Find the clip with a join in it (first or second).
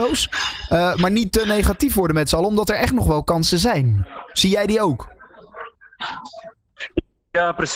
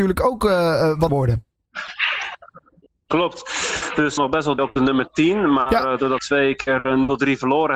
second